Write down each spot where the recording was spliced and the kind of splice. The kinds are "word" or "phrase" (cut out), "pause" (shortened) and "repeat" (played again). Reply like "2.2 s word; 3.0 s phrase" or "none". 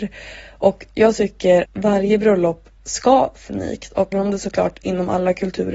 1.6 s word; 2.8 s pause; 3.5 s word; 4.1 s word